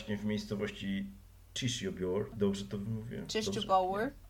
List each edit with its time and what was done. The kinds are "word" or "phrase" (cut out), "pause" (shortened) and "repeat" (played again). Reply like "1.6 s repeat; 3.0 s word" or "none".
2.3 s word